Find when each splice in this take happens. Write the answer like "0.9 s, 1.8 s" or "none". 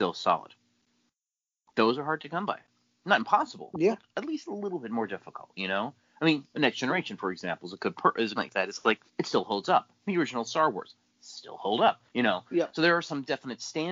8.4 s, 9.1 s, 12.1 s